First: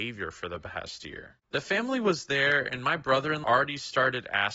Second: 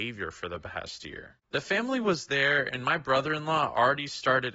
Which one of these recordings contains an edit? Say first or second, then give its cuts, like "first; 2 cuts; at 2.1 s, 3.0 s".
first; 1 cut; at 3.4 s